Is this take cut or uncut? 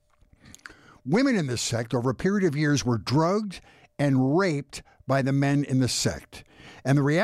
uncut